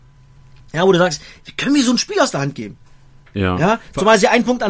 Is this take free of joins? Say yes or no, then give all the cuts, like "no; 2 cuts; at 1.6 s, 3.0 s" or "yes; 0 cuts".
yes; 0 cuts